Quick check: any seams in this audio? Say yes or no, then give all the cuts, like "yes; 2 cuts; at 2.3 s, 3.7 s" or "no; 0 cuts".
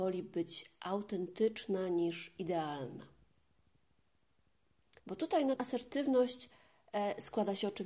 yes; 2 cuts; at 5.0 s, 5.6 s